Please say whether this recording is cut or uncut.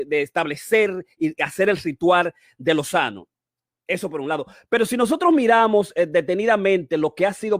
uncut